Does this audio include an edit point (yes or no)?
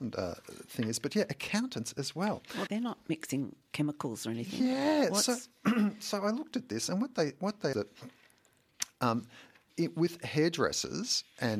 yes